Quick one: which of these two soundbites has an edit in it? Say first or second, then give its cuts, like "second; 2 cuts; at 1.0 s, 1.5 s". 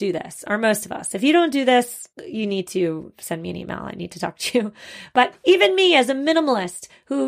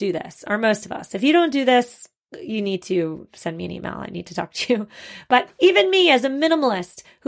first; 1 cut; at 2.1 s